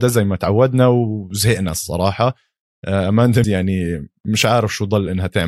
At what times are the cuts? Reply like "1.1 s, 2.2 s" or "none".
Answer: 3.4 s